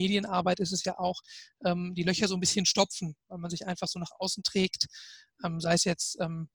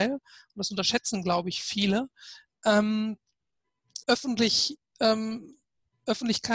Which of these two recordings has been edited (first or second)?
second